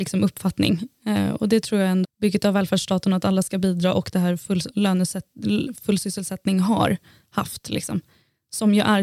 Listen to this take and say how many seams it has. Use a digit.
1